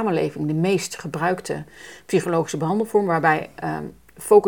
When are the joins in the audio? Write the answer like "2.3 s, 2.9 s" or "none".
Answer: none